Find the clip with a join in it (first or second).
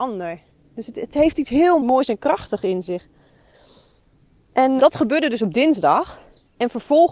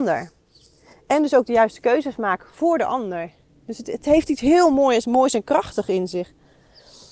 first